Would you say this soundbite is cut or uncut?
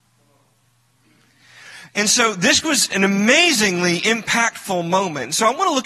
uncut